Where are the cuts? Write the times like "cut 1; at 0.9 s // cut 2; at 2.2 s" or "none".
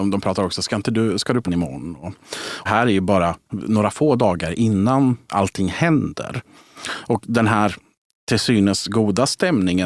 cut 1; at 1.5 s // cut 2; at 2.7 s // cut 3; at 3.5 s // cut 4; at 5.3 s